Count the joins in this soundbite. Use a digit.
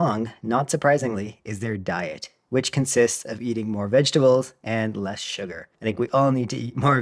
1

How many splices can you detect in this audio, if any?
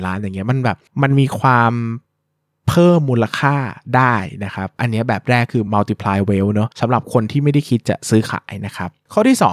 0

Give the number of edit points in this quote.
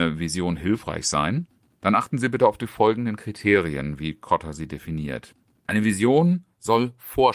0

